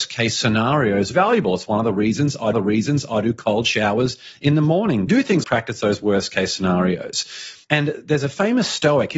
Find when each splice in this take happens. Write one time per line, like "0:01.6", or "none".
0:01.1
0:02.5
0:05.1
0:05.4
0:07.6